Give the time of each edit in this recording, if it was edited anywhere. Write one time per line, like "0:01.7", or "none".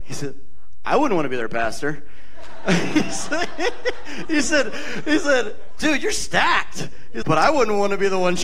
0:07.2

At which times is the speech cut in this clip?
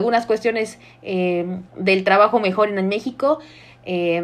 0:01.7

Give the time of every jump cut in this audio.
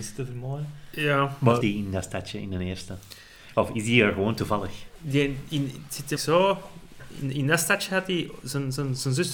0:01.6
0:06.2

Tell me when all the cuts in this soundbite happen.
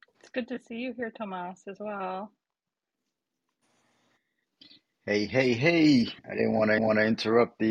0:06.2
0:06.8

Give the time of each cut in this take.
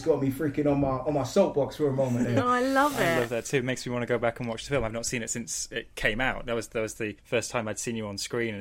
0:07.2

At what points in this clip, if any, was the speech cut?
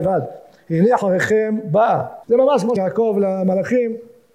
0:01.0
0:02.2
0:02.8

